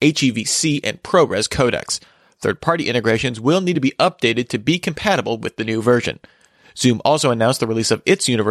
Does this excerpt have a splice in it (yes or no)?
no